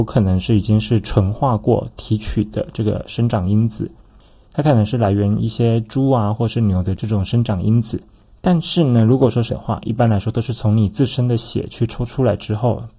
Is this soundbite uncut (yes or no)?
no